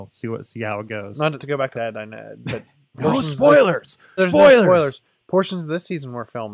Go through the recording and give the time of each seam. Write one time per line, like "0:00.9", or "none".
0:01.4
0:01.7
0:02.9
0:04.2